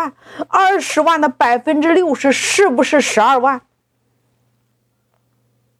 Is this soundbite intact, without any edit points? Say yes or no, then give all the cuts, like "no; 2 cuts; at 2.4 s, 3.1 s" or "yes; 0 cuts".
yes; 0 cuts